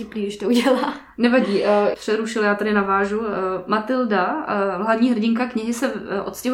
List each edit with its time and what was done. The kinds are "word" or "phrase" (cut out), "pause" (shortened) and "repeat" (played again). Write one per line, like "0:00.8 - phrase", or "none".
0:01.9 - phrase